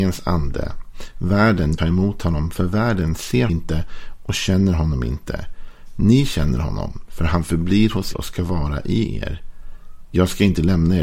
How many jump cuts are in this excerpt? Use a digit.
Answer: 3